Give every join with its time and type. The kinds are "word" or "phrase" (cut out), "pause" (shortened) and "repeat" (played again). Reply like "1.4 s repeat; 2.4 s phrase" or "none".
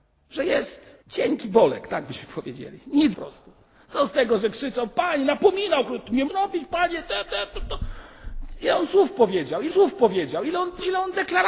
1.0 s pause; 3.1 s phrase; 6.3 s phrase; 7.3 s repeat; 9.7 s repeat